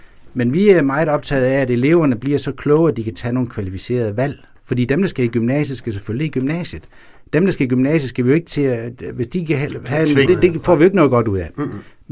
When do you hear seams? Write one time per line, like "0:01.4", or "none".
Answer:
0:10.3

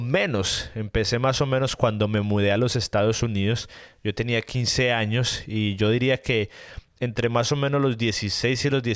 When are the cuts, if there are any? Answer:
none

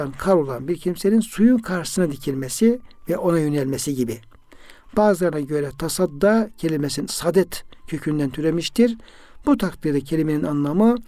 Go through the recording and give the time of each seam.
0:07.1

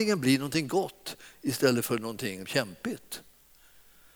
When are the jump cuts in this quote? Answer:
0:02.4

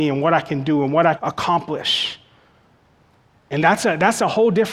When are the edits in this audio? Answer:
0:01.2

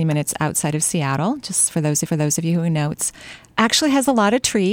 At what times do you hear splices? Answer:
0:02.1

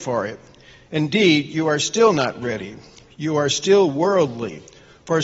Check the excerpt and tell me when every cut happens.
none

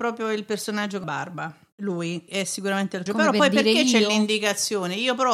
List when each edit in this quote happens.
0:01.0
0:02.3
0:03.1

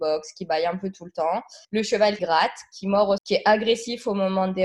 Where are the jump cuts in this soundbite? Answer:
0:01.6
0:02.2
0:03.2

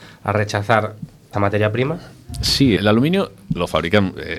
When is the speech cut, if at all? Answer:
0:01.3
0:02.8

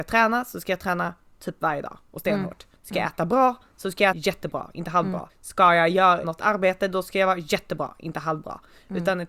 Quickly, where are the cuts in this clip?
0:02.7
0:04.1
0:05.3
0:06.2

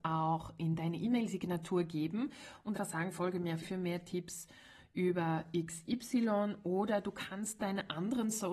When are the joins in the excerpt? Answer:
0:02.7
0:03.6

